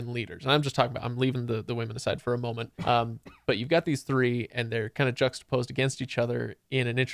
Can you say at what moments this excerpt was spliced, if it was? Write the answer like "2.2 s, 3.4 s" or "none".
2.8 s